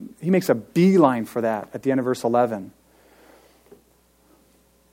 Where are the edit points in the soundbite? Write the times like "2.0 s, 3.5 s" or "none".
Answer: none